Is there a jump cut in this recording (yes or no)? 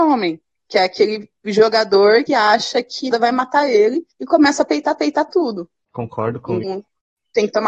yes